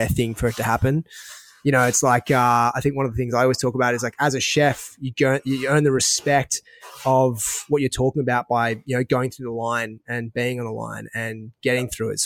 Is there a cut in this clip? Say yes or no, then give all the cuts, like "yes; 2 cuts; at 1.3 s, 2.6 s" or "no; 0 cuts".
no; 0 cuts